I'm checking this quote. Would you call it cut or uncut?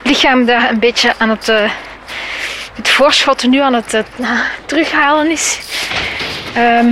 uncut